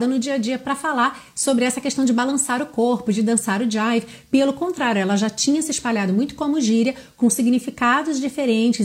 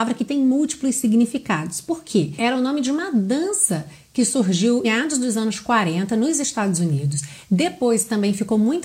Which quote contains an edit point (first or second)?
second